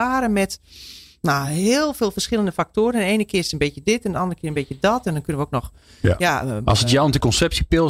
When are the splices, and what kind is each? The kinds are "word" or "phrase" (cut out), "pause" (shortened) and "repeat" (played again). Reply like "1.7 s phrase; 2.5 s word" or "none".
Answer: none